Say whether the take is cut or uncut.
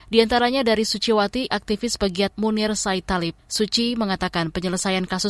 cut